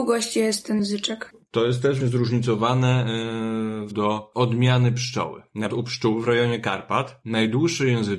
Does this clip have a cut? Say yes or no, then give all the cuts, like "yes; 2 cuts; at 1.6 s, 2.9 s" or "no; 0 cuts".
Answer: yes; 3 cuts; at 2.0 s, 3.9 s, 5.7 s